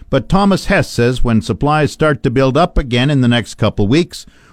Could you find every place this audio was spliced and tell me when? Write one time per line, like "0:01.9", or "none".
none